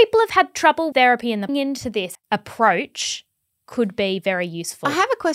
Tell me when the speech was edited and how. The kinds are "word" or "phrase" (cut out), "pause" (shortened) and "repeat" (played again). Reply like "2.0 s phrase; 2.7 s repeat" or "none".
0.9 s word; 1.5 s phrase; 2.1 s phrase